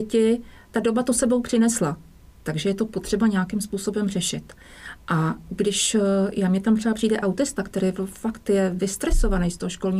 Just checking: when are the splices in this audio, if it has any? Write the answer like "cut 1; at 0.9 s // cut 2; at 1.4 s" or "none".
none